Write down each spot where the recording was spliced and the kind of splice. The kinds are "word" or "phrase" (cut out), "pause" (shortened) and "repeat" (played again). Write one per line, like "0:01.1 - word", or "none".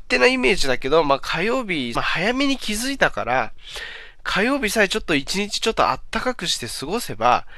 0:01.9 - phrase